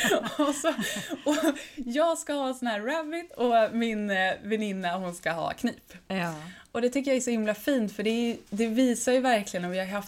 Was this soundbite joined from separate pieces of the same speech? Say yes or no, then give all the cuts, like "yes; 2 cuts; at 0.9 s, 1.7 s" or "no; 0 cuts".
no; 0 cuts